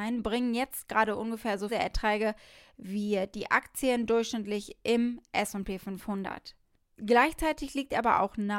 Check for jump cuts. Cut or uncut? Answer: cut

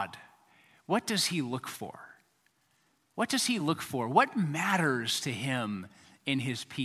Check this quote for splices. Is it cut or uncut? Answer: uncut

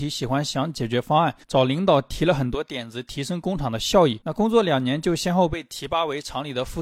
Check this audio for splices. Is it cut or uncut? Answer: cut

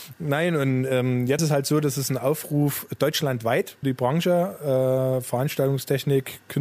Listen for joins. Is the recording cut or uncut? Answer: cut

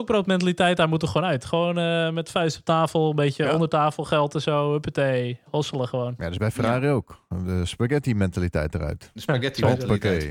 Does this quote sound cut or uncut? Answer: uncut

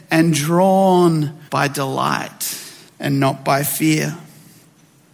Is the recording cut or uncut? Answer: cut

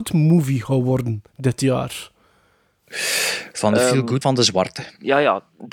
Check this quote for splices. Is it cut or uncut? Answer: cut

